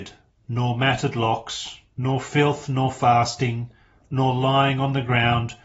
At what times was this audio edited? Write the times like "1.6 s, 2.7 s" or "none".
none